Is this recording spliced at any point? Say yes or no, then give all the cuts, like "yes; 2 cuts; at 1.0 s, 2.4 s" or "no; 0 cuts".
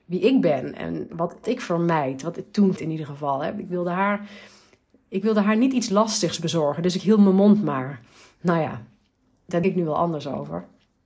yes; 3 cuts; at 1.4 s, 2.8 s, 9.6 s